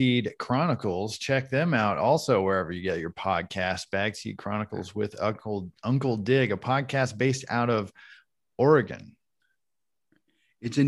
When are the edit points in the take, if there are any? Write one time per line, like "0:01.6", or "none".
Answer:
none